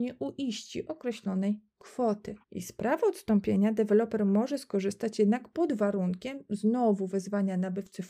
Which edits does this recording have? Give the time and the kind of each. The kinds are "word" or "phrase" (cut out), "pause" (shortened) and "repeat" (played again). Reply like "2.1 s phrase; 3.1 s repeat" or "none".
2.4 s pause